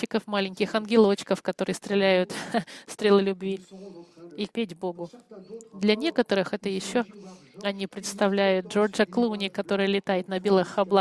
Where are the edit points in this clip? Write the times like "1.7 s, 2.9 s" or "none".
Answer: 4.5 s